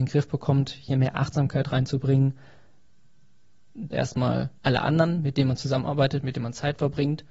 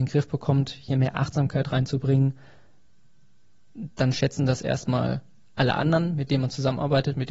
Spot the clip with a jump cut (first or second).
first